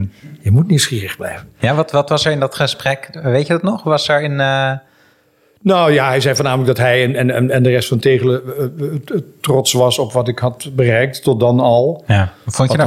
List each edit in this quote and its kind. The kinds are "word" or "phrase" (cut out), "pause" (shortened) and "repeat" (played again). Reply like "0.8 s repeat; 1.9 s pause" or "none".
none